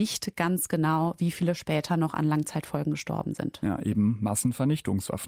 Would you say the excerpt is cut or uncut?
uncut